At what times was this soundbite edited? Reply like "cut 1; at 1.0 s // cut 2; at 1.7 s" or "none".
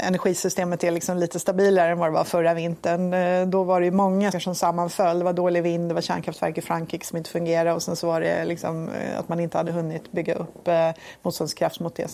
cut 1; at 4.3 s